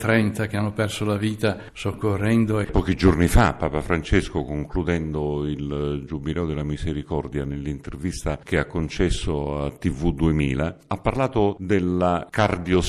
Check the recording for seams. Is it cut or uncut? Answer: uncut